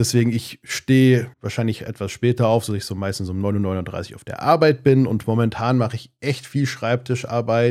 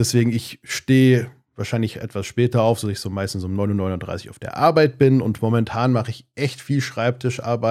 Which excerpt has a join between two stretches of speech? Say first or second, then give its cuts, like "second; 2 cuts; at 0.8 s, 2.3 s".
first; 1 cut; at 1.3 s